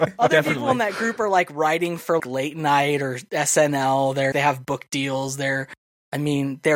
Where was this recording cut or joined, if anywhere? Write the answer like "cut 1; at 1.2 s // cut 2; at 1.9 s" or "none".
cut 1; at 2.2 s // cut 2; at 4.3 s